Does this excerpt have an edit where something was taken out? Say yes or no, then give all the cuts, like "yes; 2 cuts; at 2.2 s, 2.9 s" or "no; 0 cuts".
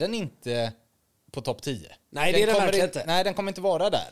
yes; 1 cut; at 2.0 s